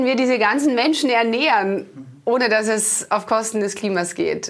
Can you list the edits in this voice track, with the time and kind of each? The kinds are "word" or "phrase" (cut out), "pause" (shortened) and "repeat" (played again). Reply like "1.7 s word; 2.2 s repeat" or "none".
none